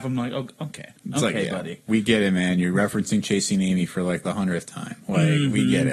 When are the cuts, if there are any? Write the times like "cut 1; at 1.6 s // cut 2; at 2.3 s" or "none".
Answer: none